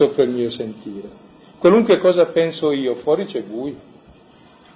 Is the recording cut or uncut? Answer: uncut